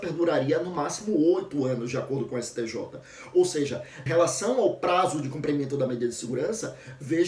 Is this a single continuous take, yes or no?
no